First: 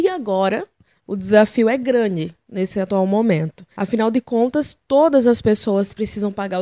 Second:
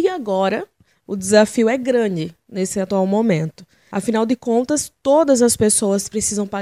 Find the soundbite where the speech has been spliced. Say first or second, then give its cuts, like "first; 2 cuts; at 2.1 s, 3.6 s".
first; 1 cut; at 3.7 s